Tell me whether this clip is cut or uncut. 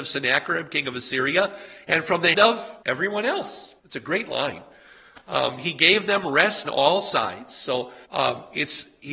cut